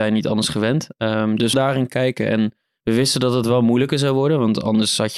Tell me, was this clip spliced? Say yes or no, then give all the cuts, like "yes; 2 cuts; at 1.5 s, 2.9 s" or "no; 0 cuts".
yes; 1 cut; at 1.5 s